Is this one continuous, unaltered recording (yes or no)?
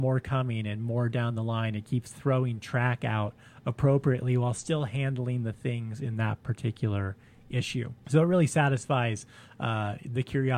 yes